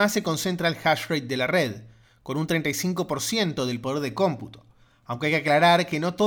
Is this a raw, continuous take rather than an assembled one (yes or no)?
yes